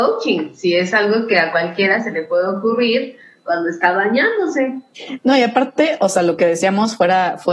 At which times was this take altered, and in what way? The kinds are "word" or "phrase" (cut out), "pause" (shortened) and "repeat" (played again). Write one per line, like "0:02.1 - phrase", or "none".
none